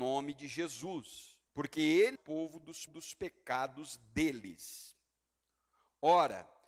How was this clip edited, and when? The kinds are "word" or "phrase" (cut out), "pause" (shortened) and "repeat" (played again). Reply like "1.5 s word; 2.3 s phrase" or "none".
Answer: 1.5 s pause; 2.2 s phrase; 2.9 s repeat